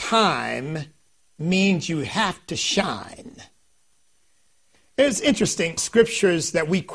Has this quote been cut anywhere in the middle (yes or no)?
yes